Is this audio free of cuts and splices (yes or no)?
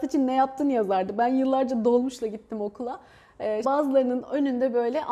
no